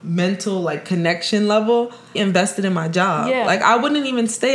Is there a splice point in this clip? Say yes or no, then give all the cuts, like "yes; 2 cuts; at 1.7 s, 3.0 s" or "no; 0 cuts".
yes; 1 cut; at 2.2 s